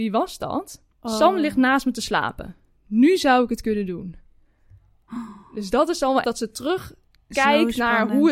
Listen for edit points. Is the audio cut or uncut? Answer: cut